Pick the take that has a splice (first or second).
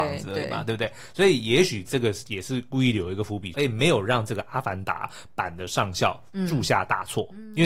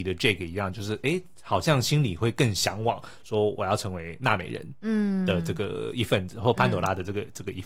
first